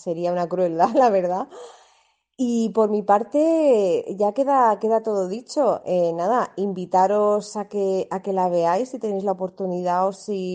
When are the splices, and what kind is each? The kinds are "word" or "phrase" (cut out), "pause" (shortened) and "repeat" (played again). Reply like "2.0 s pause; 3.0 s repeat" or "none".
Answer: none